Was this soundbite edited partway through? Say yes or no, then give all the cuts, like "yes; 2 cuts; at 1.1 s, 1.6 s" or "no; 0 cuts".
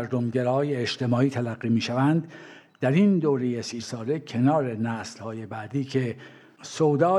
yes; 1 cut; at 3.8 s